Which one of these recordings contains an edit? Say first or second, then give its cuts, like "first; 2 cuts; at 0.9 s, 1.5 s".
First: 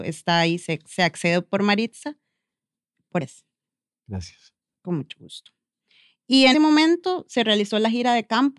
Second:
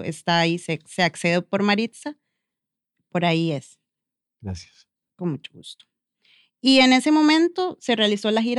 first; 2 cuts; at 3.2 s, 6.5 s